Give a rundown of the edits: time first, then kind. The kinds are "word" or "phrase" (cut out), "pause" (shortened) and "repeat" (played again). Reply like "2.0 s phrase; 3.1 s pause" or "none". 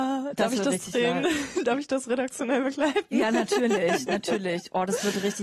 none